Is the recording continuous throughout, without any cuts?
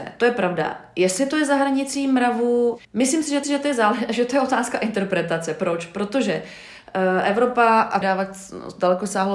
no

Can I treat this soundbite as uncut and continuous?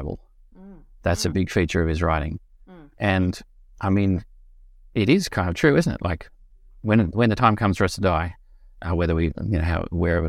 yes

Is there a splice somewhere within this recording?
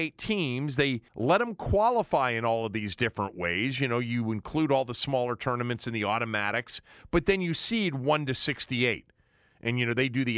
yes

